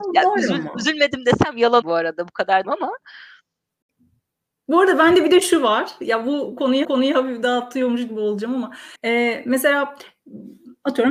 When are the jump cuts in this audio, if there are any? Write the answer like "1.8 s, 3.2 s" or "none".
1.8 s, 2.6 s, 6.8 s, 9.0 s

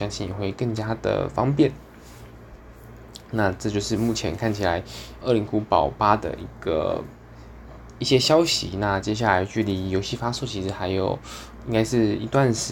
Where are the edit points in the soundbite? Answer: 5.2 s

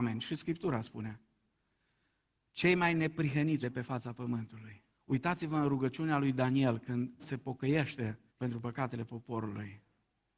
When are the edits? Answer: 3.6 s, 4.9 s, 7.2 s, 8.3 s

